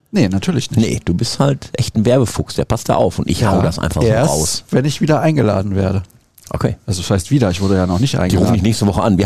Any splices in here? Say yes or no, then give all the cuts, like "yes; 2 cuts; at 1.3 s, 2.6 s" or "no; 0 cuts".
no; 0 cuts